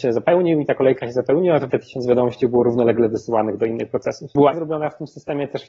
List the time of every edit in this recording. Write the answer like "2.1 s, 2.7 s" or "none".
1.7 s, 4.5 s

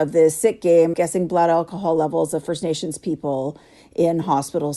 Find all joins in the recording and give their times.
0.9 s

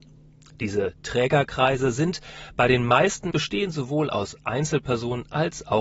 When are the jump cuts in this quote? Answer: 3.3 s

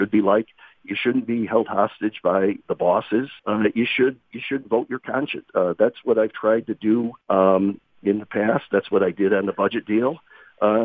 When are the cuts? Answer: 3.4 s, 5.5 s, 7.2 s

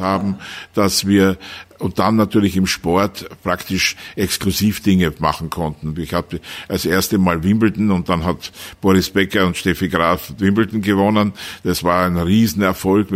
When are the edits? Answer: none

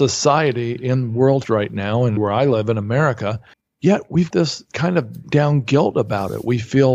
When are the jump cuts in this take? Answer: 1.4 s, 2.2 s, 3.5 s, 4.3 s, 4.7 s, 5.2 s

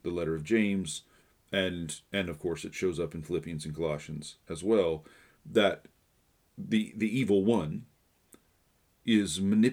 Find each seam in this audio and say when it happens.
1.2 s, 6.1 s

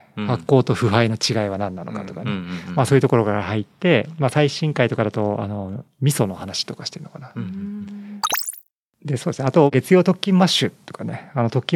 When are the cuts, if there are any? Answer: none

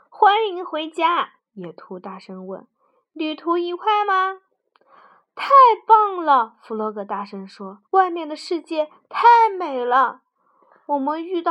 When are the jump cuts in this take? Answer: 1.4 s, 7.9 s

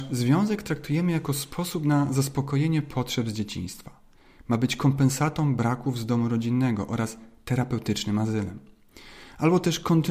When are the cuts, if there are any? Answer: none

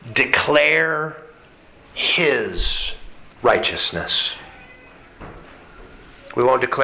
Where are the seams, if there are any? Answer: 3.3 s

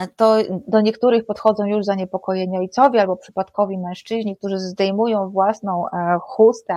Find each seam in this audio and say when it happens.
none

